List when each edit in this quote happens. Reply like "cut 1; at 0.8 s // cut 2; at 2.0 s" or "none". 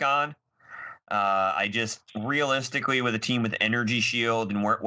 cut 1; at 2.1 s